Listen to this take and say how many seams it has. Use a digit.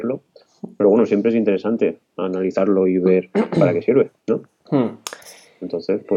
1